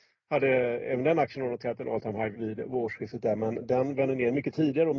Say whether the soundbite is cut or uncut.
cut